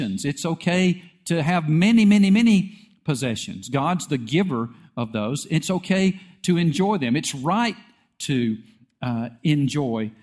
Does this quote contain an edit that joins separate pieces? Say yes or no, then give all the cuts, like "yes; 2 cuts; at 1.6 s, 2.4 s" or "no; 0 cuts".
no; 0 cuts